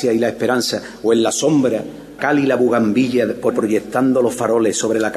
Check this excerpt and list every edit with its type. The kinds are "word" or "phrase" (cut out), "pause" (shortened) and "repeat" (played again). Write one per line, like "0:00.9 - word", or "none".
0:02.2 - word
0:03.5 - word